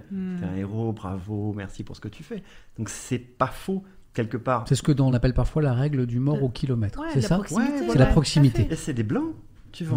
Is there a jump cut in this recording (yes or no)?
yes